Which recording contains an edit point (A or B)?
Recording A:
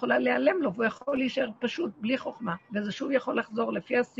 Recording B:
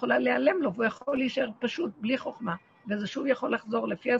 A